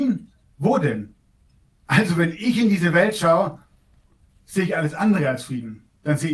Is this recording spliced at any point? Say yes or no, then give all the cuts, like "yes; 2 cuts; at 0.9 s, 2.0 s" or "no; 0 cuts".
no; 0 cuts